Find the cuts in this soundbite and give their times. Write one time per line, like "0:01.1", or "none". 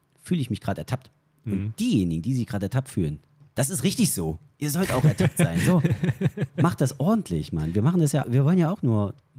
0:08.2